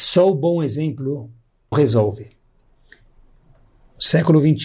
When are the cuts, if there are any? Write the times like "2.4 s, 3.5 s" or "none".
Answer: 1.7 s